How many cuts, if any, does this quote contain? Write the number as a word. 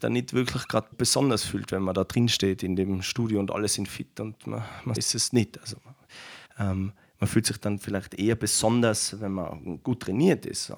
three